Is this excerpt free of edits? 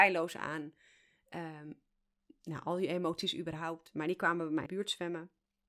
no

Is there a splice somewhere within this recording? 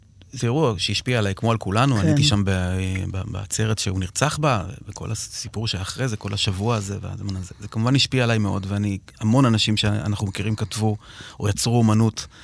no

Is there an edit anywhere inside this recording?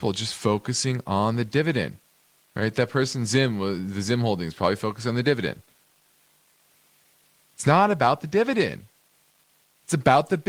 no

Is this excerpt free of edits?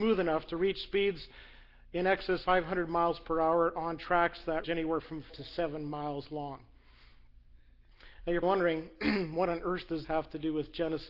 no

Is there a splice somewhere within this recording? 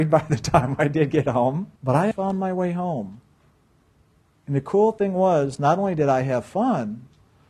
yes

